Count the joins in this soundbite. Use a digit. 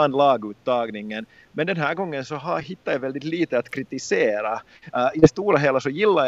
0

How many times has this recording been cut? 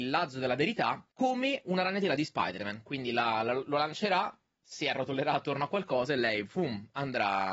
1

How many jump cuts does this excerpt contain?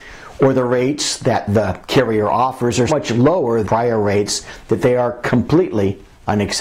2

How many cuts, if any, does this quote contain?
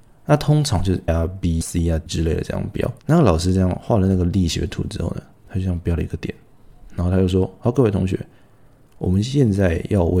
4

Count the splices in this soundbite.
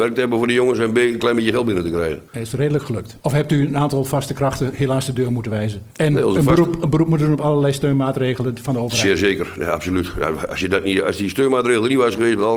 3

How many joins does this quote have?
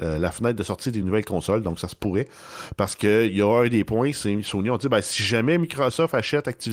0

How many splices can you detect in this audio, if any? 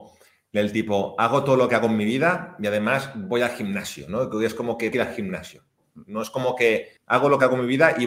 2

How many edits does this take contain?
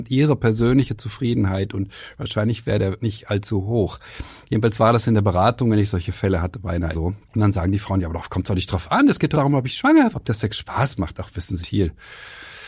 6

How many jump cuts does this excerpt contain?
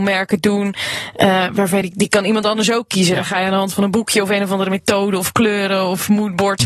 1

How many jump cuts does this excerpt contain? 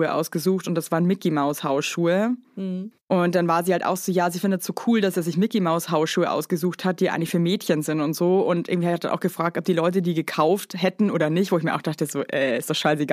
1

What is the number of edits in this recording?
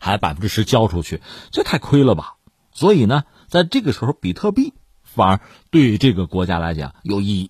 0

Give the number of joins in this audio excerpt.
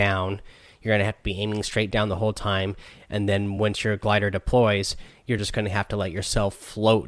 0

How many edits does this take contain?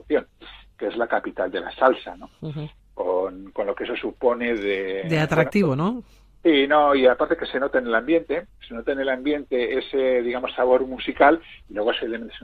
0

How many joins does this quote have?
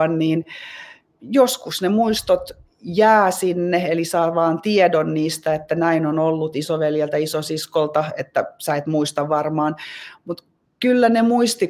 0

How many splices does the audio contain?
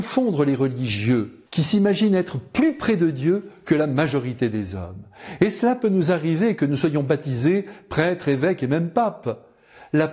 1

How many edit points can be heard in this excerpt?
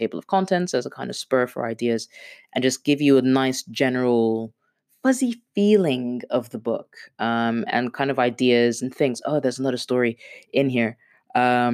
0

